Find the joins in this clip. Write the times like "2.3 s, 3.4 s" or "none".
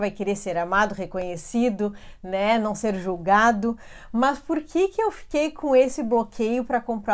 none